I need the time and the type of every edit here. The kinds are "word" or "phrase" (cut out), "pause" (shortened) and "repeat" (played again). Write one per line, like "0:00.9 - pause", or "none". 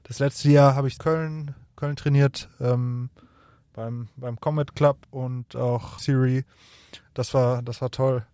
0:01.0 - phrase
0:05.0 - pause
0:06.0 - phrase